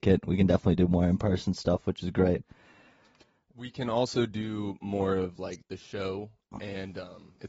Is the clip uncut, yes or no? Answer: yes